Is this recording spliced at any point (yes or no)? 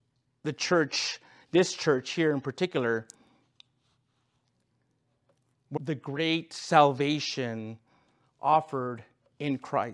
yes